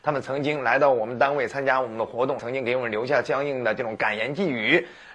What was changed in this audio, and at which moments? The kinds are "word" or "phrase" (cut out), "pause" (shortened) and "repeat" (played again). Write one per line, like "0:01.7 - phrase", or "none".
0:02.4 - phrase